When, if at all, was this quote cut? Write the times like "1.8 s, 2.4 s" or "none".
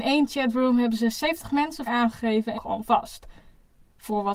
1.9 s, 2.5 s